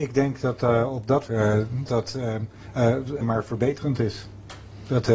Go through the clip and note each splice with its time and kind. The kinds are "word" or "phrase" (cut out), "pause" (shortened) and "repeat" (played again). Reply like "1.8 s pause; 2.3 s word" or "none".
1.3 s word; 1.9 s word; 3.2 s word